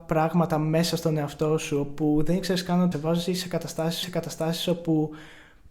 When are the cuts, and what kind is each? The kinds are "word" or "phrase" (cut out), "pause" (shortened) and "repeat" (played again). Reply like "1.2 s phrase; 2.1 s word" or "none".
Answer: 2.9 s phrase; 4.0 s repeat

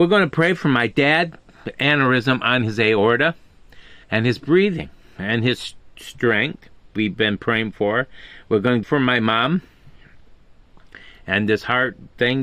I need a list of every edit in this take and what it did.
4.0 s pause; 6.9 s word; 8.8 s phrase

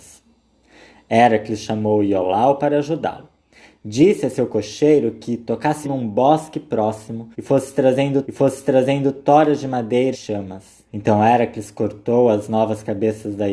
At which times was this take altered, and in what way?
5.8 s word; 7.3 s pause; 8.2 s repeat; 10.1 s word; 10.9 s pause

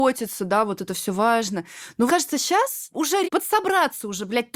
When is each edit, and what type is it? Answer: 2.1 s word; 3.2 s word

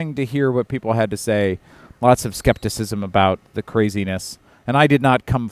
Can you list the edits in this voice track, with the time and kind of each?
none

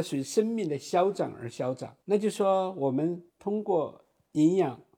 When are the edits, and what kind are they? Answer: 2.0 s pause; 3.3 s pause

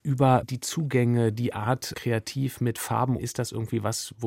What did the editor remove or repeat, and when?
1.9 s word; 3.2 s word

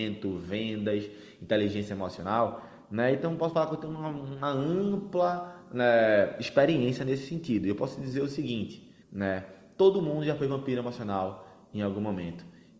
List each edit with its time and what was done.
9.0 s pause

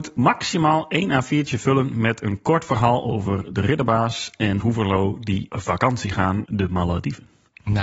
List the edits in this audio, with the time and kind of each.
4.6 s word; 5.5 s word; 6.4 s word

